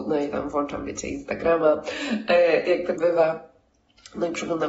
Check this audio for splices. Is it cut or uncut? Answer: cut